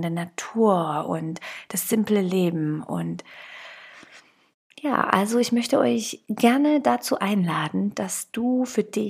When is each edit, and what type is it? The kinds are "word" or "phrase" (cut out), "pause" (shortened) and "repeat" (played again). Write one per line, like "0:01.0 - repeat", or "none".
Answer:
none